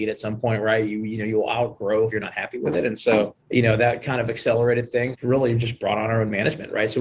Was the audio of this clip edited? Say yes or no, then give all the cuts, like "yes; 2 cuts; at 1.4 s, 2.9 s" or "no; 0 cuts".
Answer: yes; 3 cuts; at 2.1 s, 3.4 s, 5.1 s